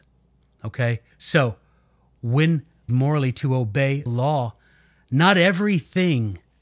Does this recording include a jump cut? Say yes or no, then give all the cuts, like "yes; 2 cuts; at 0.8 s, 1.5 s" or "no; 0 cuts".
yes; 3 cuts; at 1.1 s, 2.9 s, 4.1 s